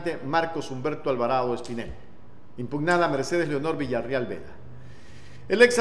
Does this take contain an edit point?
no; 0 cuts

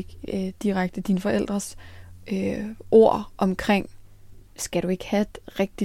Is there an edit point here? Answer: yes; 1 cut; at 4.5 s

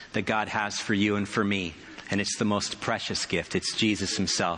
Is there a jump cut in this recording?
no; 0 cuts

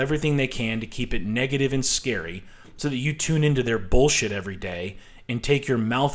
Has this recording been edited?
no; 0 cuts

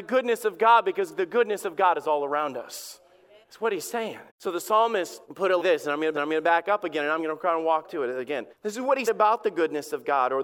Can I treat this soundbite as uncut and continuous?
no; 9 cuts; at 3.4 s, 4.3 s, 5.2 s, 5.6 s, 6.1 s, 7.2 s, 7.8 s, 8.5 s, 9.1 s

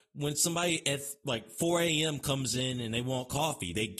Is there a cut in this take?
no; 0 cuts

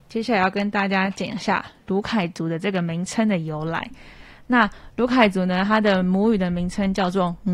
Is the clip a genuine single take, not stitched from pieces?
yes; 0 cuts

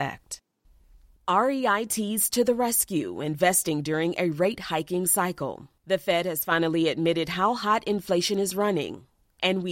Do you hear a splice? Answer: yes; 1 cut; at 5.8 s

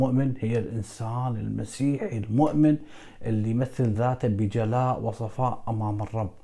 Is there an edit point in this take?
no; 0 cuts

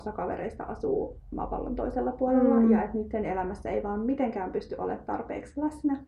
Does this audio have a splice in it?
no; 0 cuts

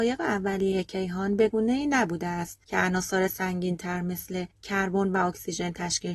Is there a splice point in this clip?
yes; 2 cuts; at 2.6 s, 4.5 s

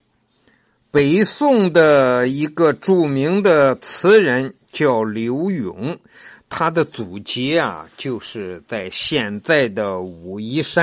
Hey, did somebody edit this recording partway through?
no; 0 cuts

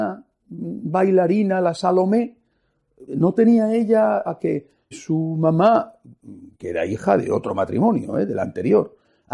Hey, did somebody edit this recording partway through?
yes; 4 cuts; at 3.1 s, 4.3 s, 4.9 s, 6.5 s

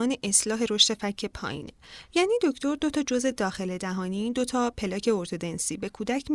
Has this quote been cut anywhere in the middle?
no; 0 cuts

